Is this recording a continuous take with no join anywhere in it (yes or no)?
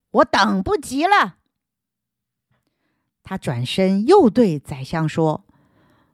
yes